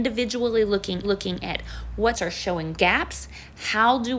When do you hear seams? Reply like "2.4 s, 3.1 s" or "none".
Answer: 1.0 s, 2.1 s, 2.7 s